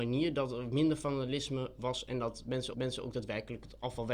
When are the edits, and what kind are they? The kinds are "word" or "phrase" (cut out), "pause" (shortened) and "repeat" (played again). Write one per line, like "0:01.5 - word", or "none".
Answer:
0:02.7 - repeat